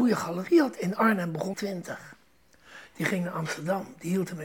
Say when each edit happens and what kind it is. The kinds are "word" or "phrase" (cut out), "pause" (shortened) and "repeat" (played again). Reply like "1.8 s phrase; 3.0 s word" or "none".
1.5 s phrase

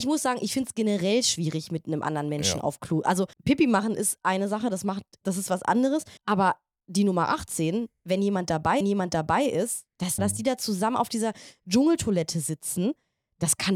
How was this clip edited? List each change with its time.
3.3 s pause; 5.2 s word; 6.2 s pause; 8.8 s repeat; 10.2 s phrase

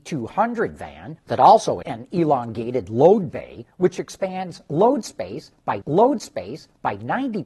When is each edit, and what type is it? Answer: 1.2 s pause; 1.8 s word; 3.7 s pause; 5.8 s repeat

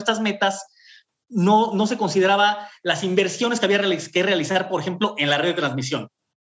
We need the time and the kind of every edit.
none

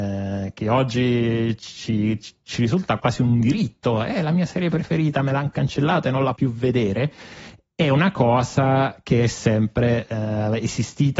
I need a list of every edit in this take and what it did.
3.0 s word; 6.4 s word

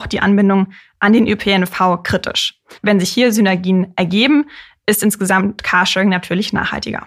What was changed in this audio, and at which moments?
2.8 s pause

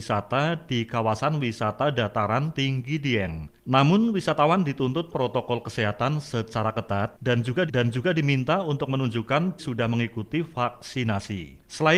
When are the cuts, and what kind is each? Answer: 5.1 s phrase; 7.7 s repeat; 9.6 s word

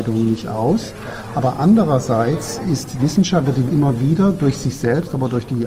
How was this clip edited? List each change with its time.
3.0 s word; 3.7 s word

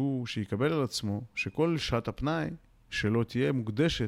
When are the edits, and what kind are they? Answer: none

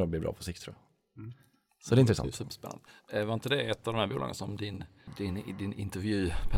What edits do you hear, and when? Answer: none

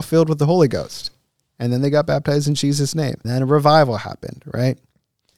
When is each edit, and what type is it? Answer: 3.2 s word

